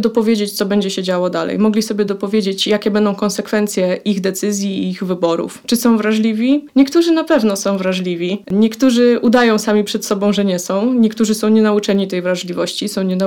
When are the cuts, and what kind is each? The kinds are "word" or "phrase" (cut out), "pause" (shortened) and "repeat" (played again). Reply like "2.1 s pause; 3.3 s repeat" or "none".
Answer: none